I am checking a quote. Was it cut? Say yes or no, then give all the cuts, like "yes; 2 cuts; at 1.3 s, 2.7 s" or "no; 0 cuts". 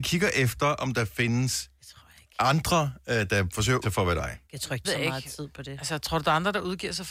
yes; 4 cuts; at 1.8 s, 3.8 s, 4.4 s, 4.8 s